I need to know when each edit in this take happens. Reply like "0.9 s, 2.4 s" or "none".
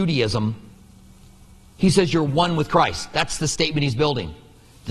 none